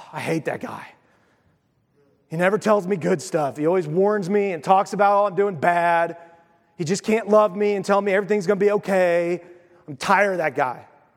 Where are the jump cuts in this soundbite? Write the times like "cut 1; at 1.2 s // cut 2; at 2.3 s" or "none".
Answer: none